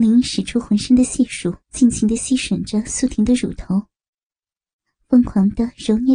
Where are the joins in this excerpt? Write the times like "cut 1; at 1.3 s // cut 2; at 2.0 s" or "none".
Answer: cut 1; at 1.6 s